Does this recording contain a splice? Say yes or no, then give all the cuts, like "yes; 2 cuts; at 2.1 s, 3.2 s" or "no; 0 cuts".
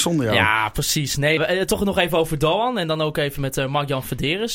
yes; 1 cut; at 1.4 s